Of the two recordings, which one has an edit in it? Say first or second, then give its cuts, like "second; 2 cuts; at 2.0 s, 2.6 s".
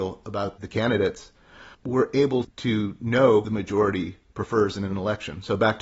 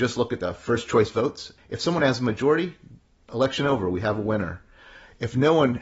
first; 2 cuts; at 1.7 s, 3.4 s